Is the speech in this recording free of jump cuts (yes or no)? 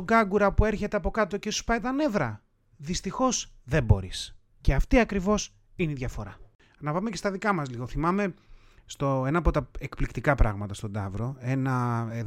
yes